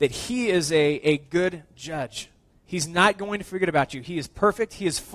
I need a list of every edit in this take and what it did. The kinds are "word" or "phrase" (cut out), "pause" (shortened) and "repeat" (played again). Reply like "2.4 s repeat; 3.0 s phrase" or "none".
none